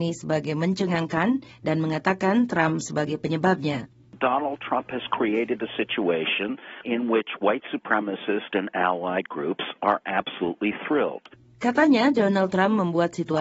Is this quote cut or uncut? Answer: uncut